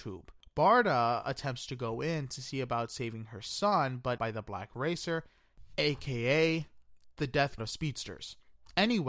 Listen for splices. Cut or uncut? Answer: cut